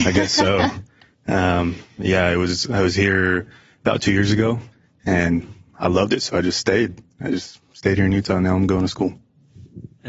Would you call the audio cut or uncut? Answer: uncut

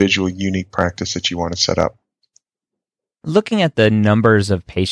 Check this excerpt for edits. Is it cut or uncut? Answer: uncut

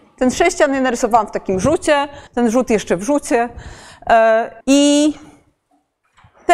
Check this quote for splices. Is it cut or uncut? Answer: cut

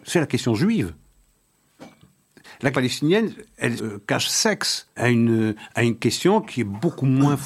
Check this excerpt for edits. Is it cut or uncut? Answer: cut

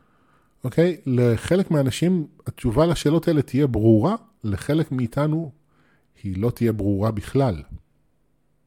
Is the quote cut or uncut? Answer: uncut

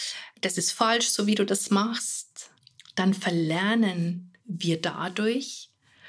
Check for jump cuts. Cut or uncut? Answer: cut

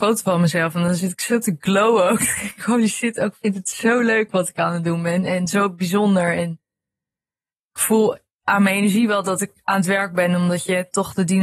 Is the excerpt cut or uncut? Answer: uncut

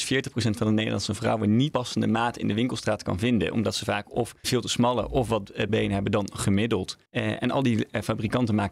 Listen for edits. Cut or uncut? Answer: cut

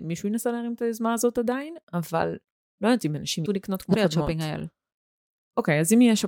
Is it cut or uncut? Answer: cut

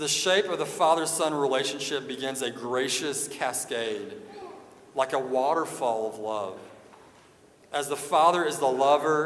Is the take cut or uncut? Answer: uncut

